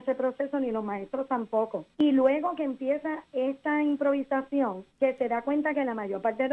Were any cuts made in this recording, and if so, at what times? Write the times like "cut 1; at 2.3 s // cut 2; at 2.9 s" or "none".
cut 1; at 1.9 s // cut 2; at 4.9 s